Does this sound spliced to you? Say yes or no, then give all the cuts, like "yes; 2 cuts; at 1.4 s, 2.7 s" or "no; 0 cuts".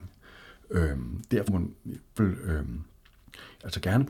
yes; 2 cuts; at 1.5 s, 2.2 s